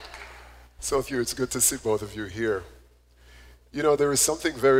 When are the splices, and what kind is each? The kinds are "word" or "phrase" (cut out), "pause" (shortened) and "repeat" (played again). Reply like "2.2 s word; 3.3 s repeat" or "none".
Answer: 1.0 s word